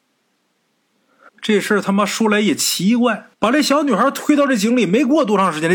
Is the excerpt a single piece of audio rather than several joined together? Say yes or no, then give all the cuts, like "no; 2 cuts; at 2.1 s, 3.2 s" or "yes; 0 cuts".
no; 2 cuts; at 1.3 s, 3.3 s